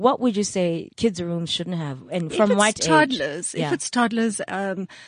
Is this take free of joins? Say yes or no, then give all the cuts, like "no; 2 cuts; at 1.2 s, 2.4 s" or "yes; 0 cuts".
no; 1 cut; at 0.9 s